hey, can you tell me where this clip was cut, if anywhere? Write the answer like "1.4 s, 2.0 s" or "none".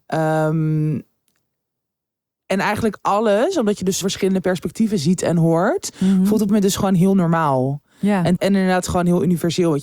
4.0 s, 6.5 s, 8.4 s